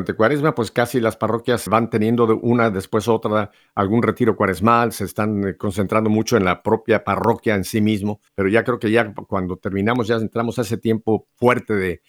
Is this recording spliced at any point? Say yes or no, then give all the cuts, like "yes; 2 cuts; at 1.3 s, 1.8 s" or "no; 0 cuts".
yes; 2 cuts; at 1.7 s, 8.3 s